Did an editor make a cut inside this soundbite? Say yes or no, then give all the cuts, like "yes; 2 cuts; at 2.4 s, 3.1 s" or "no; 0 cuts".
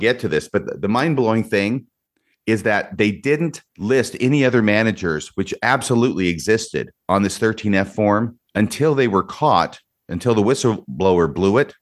yes; 4 cuts; at 2.1 s, 3.7 s, 7.0 s, 8.5 s